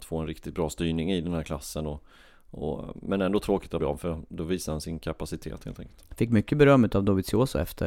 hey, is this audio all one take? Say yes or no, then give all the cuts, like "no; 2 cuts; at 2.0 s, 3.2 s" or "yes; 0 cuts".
no; 1 cut; at 3.8 s